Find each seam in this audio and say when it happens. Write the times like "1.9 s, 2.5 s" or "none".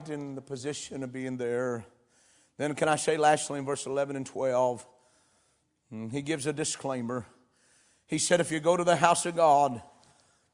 none